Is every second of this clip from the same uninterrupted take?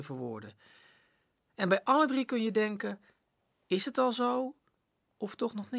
yes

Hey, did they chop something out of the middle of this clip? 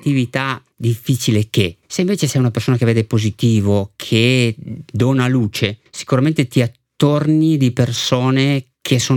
yes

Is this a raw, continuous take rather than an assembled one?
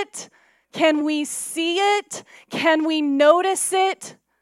yes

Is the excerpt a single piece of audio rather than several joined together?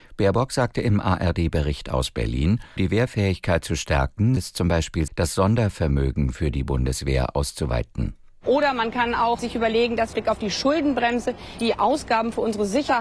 no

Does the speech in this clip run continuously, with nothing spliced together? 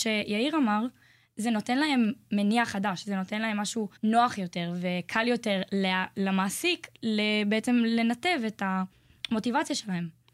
no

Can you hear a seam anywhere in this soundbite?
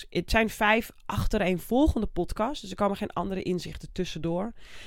no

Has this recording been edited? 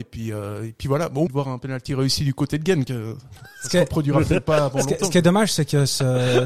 yes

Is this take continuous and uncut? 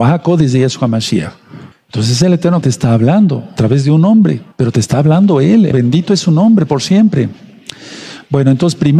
no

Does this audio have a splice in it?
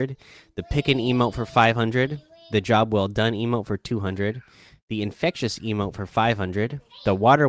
no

